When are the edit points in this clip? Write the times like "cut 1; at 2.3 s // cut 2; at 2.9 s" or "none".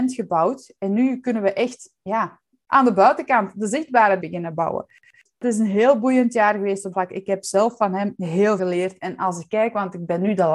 cut 1; at 4.2 s // cut 2; at 6.9 s // cut 3; at 8.1 s // cut 4; at 8.6 s